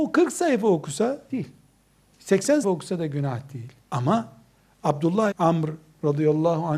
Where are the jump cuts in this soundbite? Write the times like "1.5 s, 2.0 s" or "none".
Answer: 1.3 s, 2.6 s, 3.8 s, 5.3 s